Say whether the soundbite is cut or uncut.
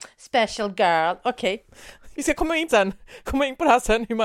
cut